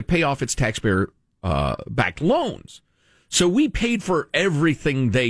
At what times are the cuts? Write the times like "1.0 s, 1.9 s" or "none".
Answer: none